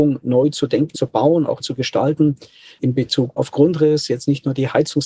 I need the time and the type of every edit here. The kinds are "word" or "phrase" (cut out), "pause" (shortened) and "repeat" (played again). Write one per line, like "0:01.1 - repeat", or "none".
0:00.9 - word
0:01.6 - word
0:02.8 - word
0:03.4 - word